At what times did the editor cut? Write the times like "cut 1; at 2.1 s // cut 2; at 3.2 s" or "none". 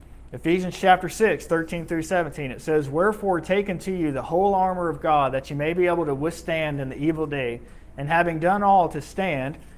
none